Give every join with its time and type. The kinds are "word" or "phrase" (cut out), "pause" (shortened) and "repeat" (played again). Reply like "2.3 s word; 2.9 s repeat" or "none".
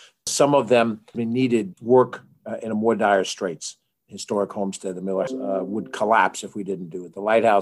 1.7 s word; 5.3 s word